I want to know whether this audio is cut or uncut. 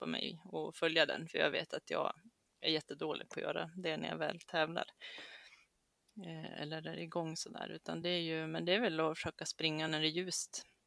uncut